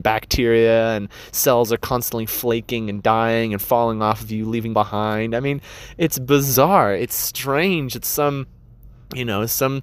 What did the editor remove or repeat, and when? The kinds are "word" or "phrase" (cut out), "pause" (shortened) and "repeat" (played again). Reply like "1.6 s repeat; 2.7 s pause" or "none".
4.7 s phrase